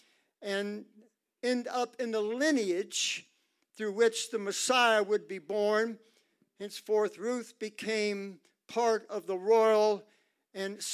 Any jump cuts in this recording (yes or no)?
no